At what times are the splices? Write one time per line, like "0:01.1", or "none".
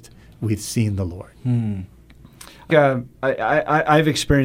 0:01.4
0:02.7
0:03.1